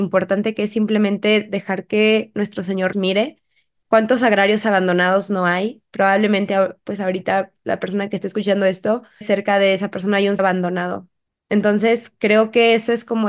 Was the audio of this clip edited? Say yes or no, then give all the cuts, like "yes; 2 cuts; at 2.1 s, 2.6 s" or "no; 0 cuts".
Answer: yes; 3 cuts; at 2.9 s, 9.2 s, 10.4 s